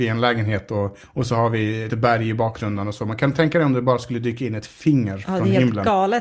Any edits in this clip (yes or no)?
yes